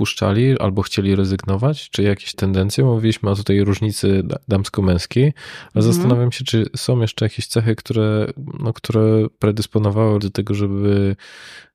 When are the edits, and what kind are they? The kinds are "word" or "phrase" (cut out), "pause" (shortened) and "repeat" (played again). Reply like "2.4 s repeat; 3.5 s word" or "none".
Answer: 2.3 s word; 10.2 s word